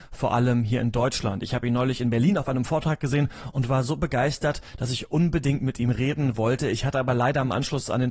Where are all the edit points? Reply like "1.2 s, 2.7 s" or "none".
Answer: none